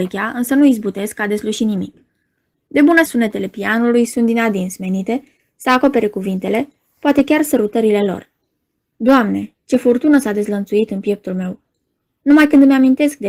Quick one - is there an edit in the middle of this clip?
yes; 1 cut; at 3.0 s

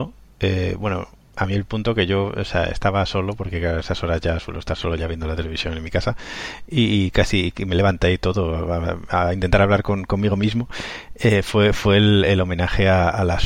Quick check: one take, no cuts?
yes; 0 cuts

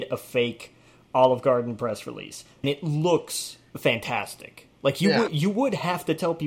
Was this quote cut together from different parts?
yes; 1 cut; at 2.6 s

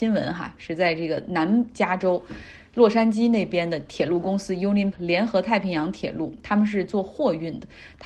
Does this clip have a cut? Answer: yes; 1 cut; at 4.9 s

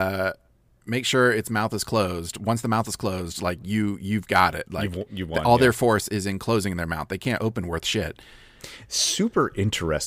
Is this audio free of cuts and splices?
yes; 0 cuts

